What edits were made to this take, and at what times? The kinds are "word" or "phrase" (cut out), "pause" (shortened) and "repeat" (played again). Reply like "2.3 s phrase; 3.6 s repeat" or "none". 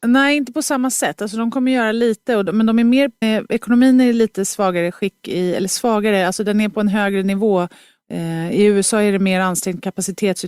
3.2 s word